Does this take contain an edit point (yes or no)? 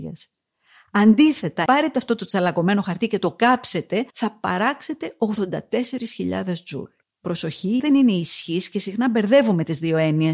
yes